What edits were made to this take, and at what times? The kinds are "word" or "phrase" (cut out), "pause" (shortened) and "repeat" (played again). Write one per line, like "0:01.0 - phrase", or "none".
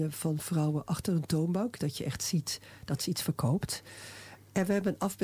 none